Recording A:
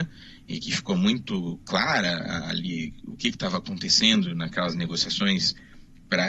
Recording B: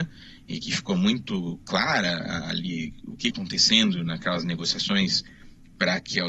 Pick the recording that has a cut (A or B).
B